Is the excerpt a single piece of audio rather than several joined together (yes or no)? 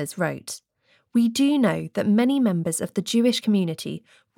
yes